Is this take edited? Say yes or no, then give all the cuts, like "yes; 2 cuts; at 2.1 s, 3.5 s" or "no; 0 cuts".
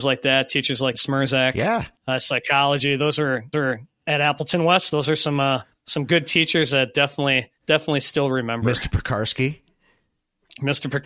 yes; 4 cuts; at 0.9 s, 2.0 s, 3.5 s, 7.6 s